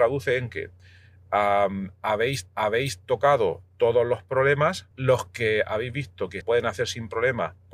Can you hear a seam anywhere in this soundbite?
yes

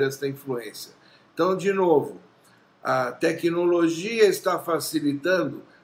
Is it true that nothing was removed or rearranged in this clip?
yes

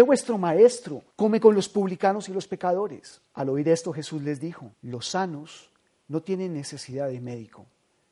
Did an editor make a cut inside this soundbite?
yes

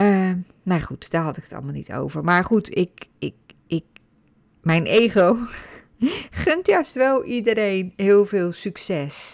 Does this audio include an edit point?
no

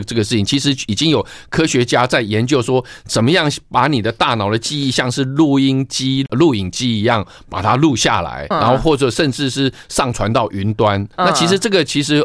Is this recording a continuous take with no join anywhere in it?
no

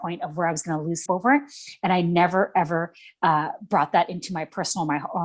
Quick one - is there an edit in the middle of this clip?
yes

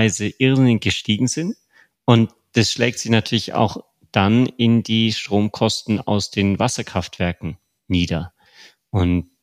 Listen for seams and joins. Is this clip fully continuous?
yes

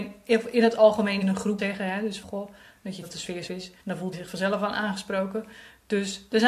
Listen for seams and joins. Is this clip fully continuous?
no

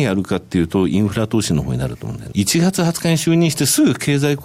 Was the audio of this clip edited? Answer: yes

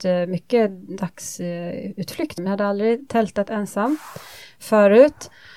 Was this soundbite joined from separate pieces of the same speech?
yes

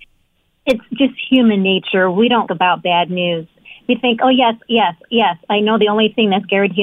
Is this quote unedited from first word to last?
no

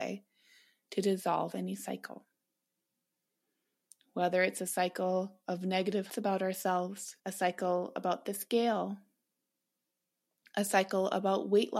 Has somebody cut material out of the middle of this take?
yes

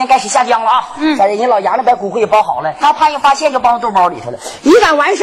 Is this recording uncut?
no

